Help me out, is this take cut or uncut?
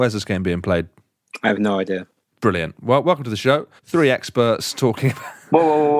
cut